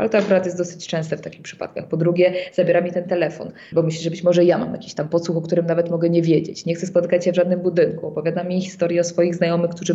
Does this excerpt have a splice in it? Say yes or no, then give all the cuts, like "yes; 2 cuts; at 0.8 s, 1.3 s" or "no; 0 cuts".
yes; 1 cut; at 3.7 s